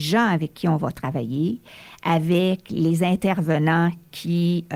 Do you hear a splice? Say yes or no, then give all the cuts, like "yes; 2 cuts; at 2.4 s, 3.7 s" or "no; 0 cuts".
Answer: no; 0 cuts